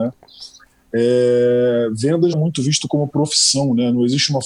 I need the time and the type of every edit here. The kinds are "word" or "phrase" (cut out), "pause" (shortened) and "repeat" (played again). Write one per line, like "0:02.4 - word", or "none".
0:02.3 - word